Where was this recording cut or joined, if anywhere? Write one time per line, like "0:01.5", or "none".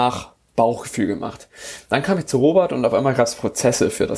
none